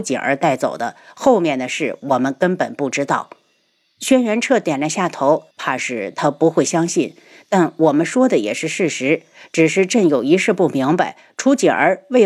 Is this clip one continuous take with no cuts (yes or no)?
no